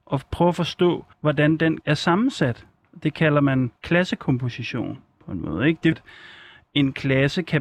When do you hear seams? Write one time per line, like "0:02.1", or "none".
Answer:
0:01.1
0:01.8
0:03.8
0:05.9